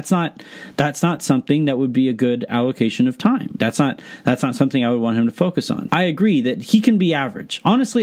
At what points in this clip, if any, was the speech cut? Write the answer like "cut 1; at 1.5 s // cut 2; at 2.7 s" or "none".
cut 1; at 3.6 s // cut 2; at 5.9 s

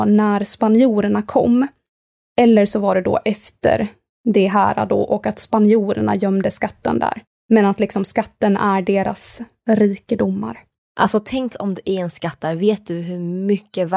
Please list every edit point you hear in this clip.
none

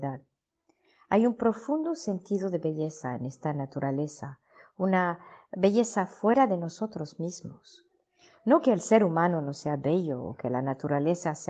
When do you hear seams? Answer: none

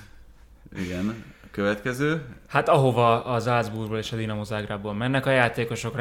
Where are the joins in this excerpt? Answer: none

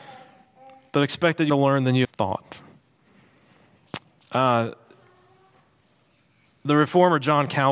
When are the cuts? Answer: cut 1; at 1.5 s // cut 2; at 2.0 s // cut 3; at 4.2 s

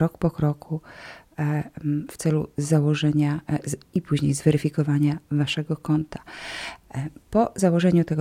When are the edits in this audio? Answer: none

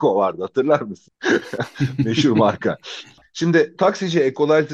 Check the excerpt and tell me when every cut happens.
cut 1; at 3.8 s

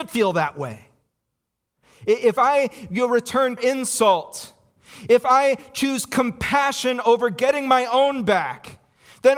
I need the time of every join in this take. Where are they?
cut 1; at 3.6 s

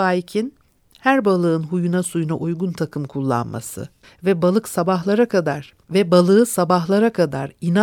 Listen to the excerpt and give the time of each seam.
cut 1; at 4.0 s // cut 2; at 5.8 s

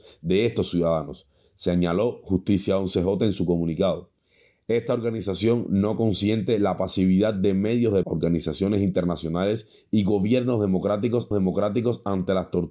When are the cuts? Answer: cut 1; at 8.0 s // cut 2; at 11.3 s

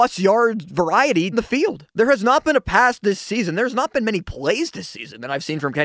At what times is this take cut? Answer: cut 1; at 1.3 s // cut 2; at 1.9 s

